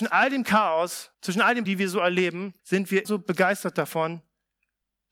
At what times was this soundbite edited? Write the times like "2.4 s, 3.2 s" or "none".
1.1 s, 1.6 s, 2.6 s, 3.0 s